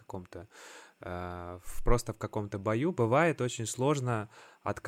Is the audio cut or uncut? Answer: uncut